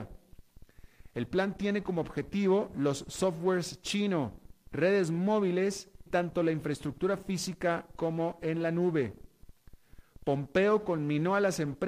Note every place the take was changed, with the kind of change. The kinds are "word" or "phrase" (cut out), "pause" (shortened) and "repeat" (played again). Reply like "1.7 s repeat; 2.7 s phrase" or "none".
6.1 s word